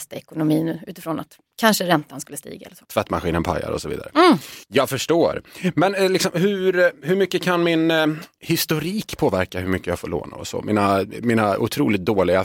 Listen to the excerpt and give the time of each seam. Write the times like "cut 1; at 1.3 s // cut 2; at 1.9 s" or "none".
cut 1; at 4.6 s